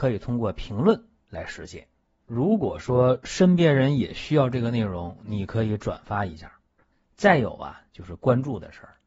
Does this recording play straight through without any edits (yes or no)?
yes